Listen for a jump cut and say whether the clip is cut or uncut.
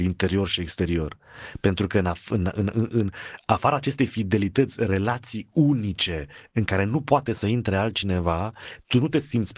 uncut